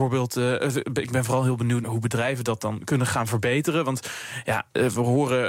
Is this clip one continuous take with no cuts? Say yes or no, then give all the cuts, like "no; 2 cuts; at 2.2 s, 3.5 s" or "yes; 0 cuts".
no; 1 cut; at 1.8 s